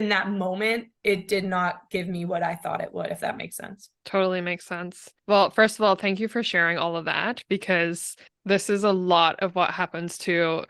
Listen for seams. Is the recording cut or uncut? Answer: cut